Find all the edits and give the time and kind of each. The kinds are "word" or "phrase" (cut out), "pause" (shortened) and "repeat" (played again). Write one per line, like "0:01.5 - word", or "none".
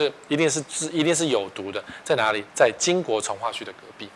0:02.5 - pause